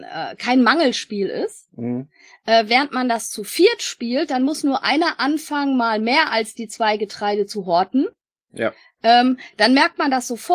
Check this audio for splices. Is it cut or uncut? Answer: uncut